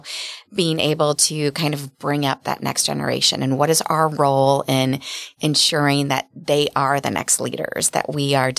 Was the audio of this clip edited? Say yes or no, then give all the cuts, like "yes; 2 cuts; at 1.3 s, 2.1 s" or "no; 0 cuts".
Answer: no; 0 cuts